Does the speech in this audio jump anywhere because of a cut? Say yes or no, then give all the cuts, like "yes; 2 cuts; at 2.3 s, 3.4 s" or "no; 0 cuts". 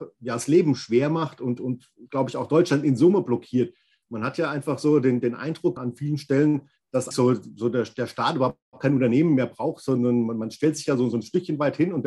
yes; 2 cuts; at 5.8 s, 7.1 s